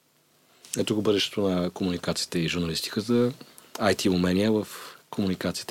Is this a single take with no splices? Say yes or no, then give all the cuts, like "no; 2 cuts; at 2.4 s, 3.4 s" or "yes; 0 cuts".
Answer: yes; 0 cuts